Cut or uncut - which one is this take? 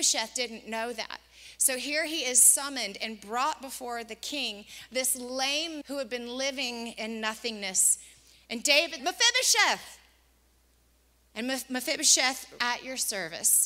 cut